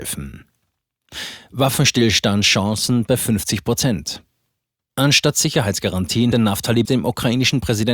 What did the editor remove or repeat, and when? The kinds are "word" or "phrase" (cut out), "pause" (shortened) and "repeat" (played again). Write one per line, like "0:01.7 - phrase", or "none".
0:03.1 - word
0:06.3 - word
0:06.8 - word